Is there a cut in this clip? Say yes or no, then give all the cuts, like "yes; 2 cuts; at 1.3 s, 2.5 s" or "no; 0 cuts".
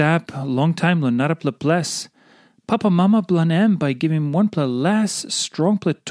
no; 0 cuts